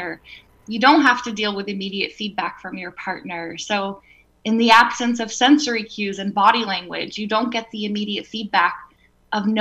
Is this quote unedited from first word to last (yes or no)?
yes